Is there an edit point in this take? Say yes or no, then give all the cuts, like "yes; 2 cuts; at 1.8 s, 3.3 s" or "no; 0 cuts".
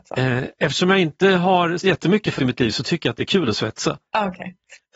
yes; 2 cuts; at 1.8 s, 2.4 s